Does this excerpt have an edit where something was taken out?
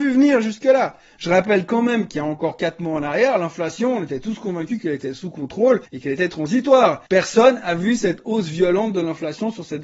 yes; 2 cuts; at 5.9 s, 7.1 s

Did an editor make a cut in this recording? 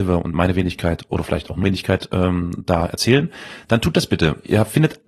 yes; 1 cut; at 1.6 s

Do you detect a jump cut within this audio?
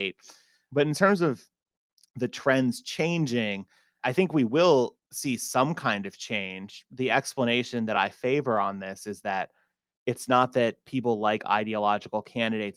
no; 0 cuts

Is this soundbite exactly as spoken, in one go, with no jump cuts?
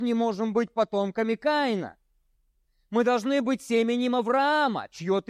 no; 1 cut; at 2.4 s

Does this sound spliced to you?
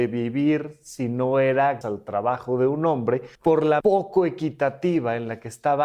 yes; 3 cuts; at 1.8 s, 3.3 s, 3.8 s

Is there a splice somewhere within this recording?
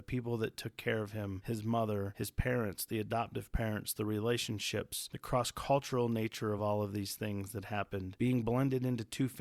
no; 0 cuts

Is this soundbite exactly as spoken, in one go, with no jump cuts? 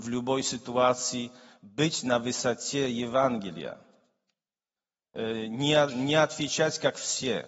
yes; 0 cuts

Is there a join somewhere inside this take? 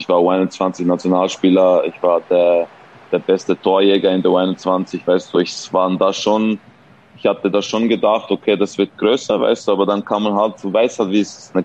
yes; 1 cut; at 5.3 s

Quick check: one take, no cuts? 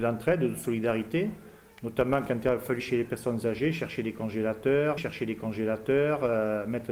no; 2 cuts; at 2.8 s, 5.0 s

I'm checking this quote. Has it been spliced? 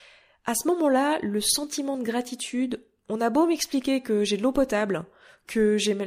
no; 0 cuts

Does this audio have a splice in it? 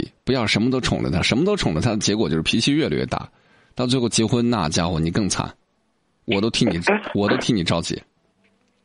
no; 0 cuts

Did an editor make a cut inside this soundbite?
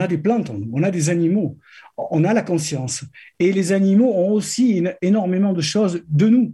no; 0 cuts

